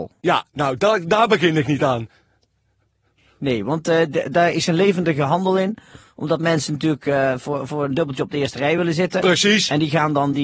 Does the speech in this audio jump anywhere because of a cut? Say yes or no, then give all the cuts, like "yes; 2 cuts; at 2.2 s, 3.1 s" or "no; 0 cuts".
no; 0 cuts